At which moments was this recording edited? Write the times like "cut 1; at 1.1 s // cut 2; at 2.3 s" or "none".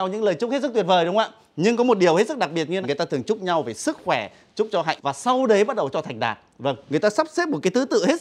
cut 1; at 2.8 s // cut 2; at 5.0 s // cut 3; at 5.9 s